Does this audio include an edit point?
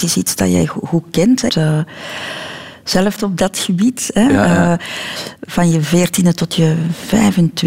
yes; 2 cuts; at 1.5 s, 3.2 s

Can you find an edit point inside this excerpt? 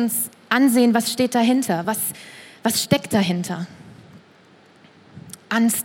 no; 0 cuts

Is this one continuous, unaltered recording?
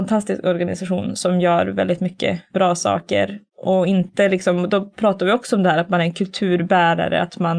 yes; 0 cuts

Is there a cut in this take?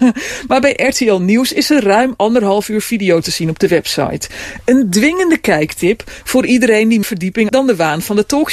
yes; 3 cuts; at 3.2 s, 7.0 s, 7.5 s

